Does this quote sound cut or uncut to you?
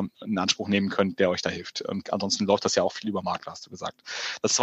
uncut